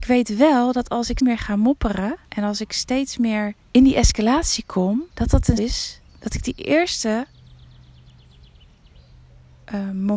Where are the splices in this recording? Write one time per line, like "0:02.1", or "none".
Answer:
0:01.2
0:02.2
0:03.6
0:05.1
0:05.6